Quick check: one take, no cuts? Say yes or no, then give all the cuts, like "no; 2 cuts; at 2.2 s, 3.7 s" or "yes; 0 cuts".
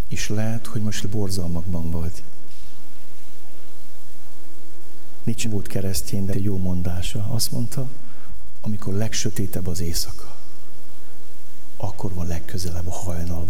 no; 3 cuts; at 1.0 s, 5.4 s, 6.3 s